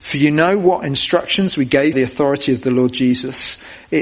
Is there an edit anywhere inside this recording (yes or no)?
yes